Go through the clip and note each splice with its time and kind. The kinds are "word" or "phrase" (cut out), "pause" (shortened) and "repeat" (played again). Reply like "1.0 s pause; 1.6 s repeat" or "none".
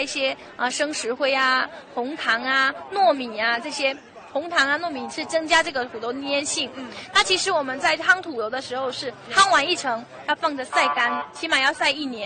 11.3 s word